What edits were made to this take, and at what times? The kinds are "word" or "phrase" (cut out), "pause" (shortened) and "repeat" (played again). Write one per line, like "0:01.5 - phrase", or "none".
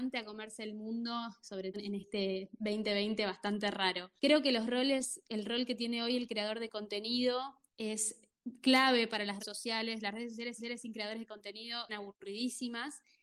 0:01.7 - word
0:04.2 - pause
0:07.7 - pause
0:09.4 - word
0:10.6 - repeat
0:11.9 - word